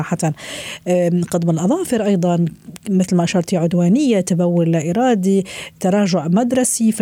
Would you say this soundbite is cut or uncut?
uncut